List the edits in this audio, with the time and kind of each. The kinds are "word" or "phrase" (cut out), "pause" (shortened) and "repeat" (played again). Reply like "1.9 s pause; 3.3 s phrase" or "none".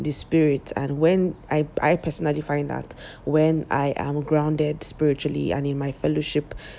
none